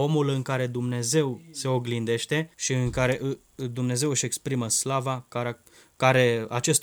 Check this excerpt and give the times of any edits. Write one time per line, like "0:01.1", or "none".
0:02.5

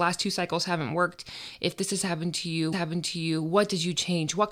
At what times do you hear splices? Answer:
0:02.7

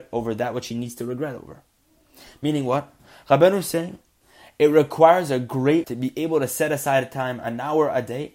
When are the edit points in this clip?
0:05.8

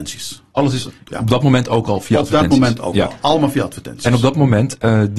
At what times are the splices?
none

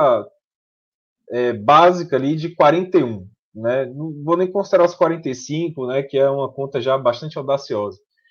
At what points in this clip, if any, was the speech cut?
none

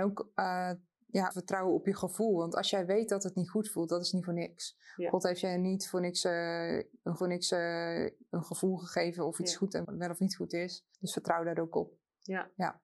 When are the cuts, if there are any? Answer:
0:01.3
0:07.2
0:09.8
0:10.9

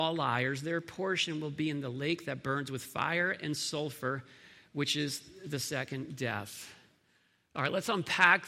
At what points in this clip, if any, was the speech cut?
none

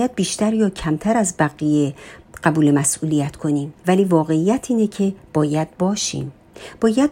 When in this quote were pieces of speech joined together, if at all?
0:03.8

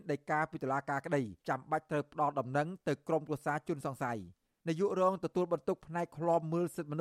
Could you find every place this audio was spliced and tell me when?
0:01.4
0:04.4

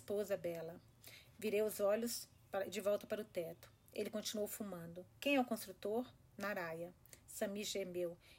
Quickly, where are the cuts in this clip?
0:05.2

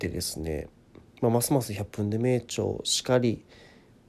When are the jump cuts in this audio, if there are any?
0:01.1

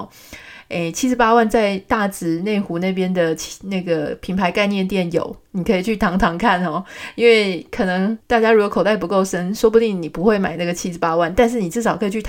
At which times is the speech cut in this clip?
0:08.2

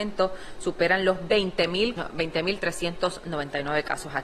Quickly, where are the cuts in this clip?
0:02.0

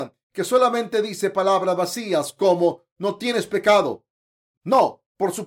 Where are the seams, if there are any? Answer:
none

